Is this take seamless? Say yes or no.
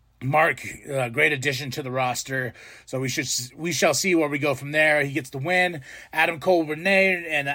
yes